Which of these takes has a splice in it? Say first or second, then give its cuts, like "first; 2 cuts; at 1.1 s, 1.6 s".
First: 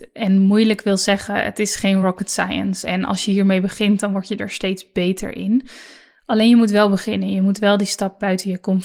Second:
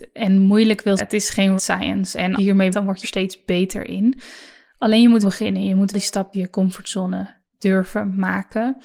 second; 8 cuts; at 1.0 s, 1.6 s, 2.4 s, 2.7 s, 3.0 s, 5.2 s, 5.9 s, 6.3 s